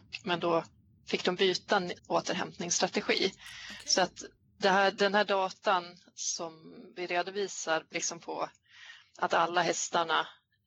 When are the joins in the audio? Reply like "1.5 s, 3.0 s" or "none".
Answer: 2.0 s, 7.9 s